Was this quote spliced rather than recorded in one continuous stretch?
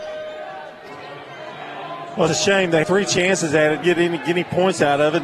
yes; 3 cuts; at 2.3 s, 2.8 s, 3.8 s

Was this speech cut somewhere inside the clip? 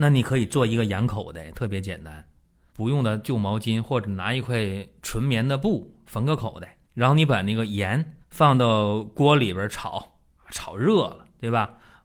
yes; 3 cuts; at 2.7 s, 6.8 s, 8.2 s

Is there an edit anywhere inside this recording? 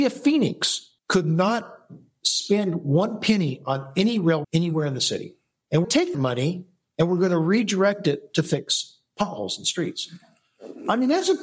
yes; 4 cuts; at 1.0 s, 4.4 s, 5.8 s, 6.1 s

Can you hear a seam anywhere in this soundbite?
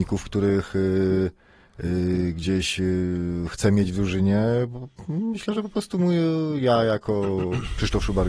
no; 0 cuts

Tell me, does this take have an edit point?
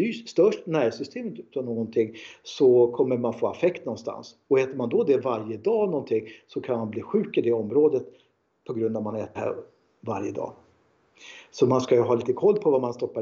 yes; 1 cut; at 9.3 s

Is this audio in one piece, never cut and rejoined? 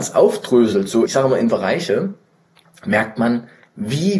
no; 2 cuts; at 1.0 s, 1.5 s

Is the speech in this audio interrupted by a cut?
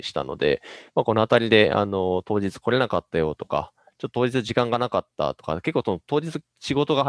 no; 0 cuts

